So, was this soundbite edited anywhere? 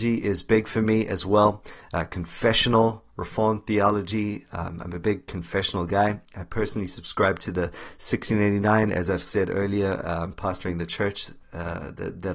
no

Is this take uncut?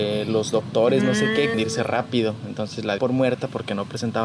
no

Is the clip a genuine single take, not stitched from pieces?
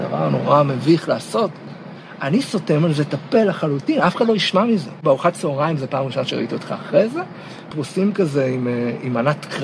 no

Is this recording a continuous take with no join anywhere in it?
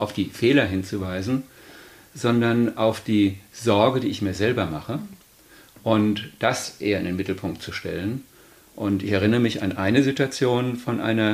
yes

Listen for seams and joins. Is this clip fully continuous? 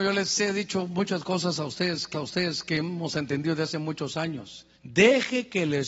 no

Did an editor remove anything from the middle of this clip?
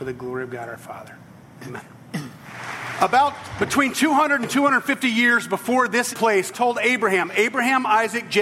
yes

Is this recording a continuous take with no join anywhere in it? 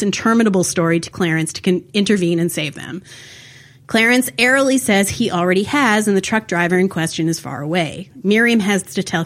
no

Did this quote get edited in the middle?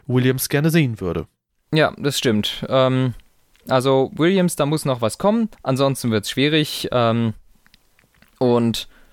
yes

